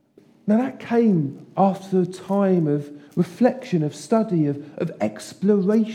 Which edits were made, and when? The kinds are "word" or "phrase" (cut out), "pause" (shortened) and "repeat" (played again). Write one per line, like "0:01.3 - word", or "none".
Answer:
0:03.1 - pause

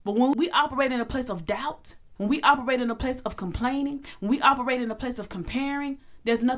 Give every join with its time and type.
none

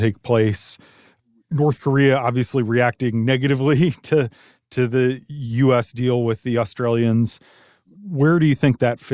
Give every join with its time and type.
none

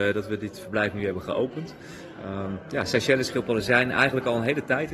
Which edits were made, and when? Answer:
none

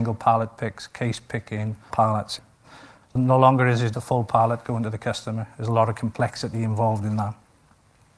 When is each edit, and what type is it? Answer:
0:01.9 - word
0:03.9 - word

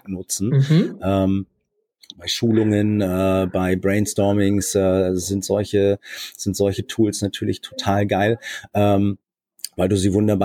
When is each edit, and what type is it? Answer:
none

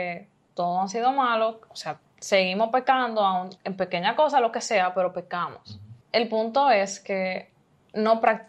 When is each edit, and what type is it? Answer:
0:03.6 - pause
0:06.0 - pause

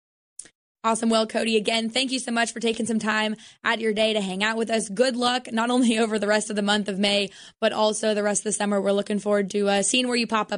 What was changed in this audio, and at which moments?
none

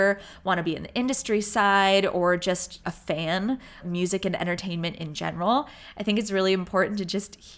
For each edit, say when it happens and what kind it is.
0:02.8 - word
0:03.8 - word

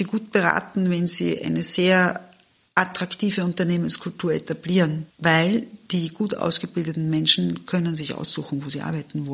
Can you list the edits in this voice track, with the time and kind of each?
0:05.1 - pause

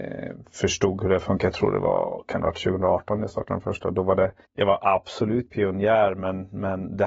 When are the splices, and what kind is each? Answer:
0:04.4 - pause
0:05.5 - word

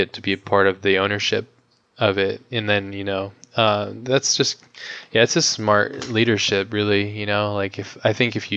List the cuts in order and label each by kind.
none

